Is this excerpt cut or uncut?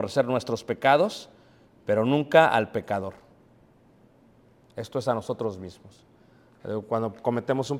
uncut